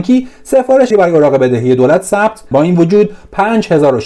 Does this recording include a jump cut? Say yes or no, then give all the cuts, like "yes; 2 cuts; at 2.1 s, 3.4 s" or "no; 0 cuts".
yes; 2 cuts; at 0.9 s, 2.5 s